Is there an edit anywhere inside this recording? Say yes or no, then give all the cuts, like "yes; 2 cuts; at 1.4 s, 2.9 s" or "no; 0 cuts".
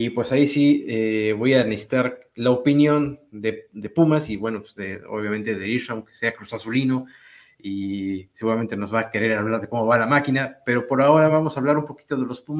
no; 0 cuts